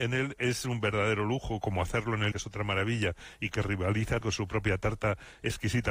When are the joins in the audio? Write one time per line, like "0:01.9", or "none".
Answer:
0:01.6
0:02.3
0:04.2